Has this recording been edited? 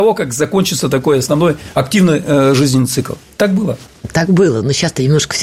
no; 0 cuts

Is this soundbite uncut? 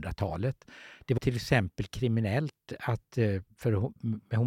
no; 1 cut; at 1.2 s

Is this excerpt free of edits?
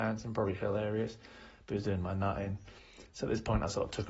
yes; 0 cuts

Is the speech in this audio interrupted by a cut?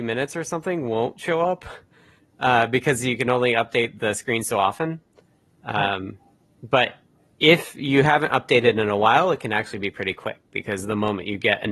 no; 0 cuts

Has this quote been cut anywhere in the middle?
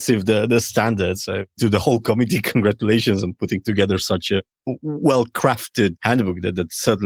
no; 0 cuts

